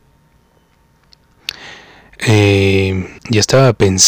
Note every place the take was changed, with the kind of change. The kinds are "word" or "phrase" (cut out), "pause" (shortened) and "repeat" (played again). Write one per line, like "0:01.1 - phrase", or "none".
0:03.2 - pause